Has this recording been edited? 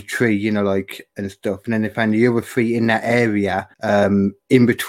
yes; 1 cut; at 3.7 s

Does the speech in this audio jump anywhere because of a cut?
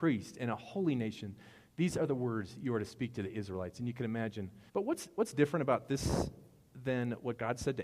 yes; 1 cut; at 4.7 s

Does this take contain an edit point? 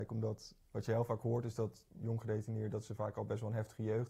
yes; 1 cut; at 1.9 s

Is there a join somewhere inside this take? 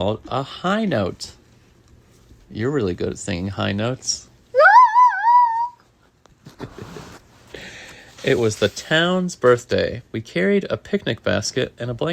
yes; 1 cut; at 10.1 s

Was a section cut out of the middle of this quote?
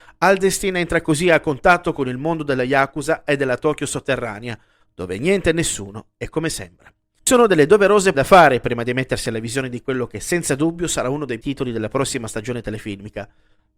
yes; 2 cuts; at 8.1 s, 11.4 s

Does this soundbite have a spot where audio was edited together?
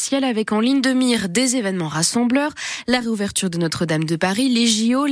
no; 0 cuts

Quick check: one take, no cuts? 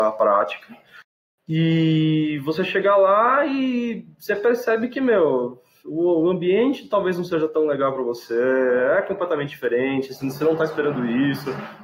yes; 0 cuts

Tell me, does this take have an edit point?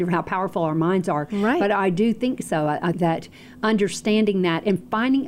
yes; 1 cut; at 2.9 s

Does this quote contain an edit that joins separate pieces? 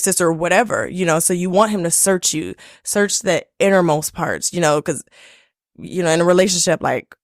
no; 0 cuts

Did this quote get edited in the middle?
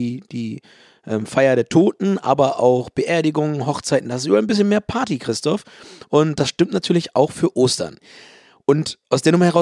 no; 0 cuts

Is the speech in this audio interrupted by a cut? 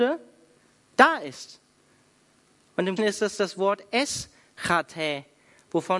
yes; 1 cut; at 3.0 s

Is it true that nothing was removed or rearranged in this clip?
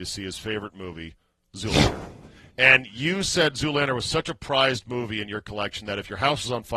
yes; 0 cuts

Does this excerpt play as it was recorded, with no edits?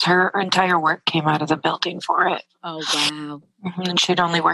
yes; 0 cuts

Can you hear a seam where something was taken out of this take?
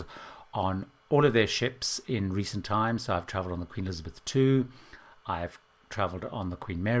no; 0 cuts

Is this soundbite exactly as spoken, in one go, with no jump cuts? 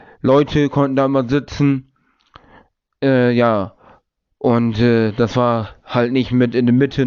yes; 0 cuts

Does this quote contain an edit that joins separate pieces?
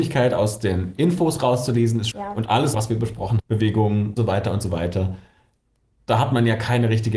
yes; 4 cuts; at 2.1 s, 2.7 s, 3.4 s, 4.2 s

